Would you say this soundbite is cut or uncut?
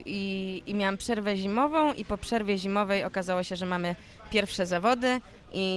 uncut